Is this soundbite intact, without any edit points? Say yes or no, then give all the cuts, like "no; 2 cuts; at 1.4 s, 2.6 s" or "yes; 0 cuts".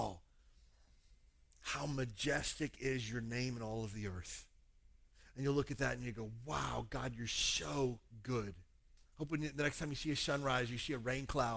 no; 1 cut; at 9.0 s